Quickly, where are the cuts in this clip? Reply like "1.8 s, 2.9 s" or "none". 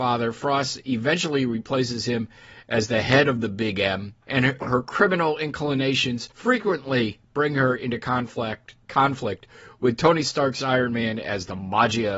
4.2 s, 6.3 s